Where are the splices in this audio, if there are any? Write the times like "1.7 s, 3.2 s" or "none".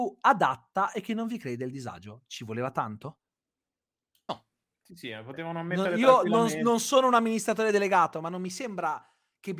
none